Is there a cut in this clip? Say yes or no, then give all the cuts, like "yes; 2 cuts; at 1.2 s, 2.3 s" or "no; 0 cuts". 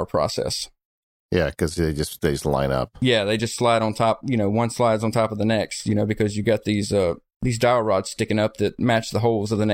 no; 0 cuts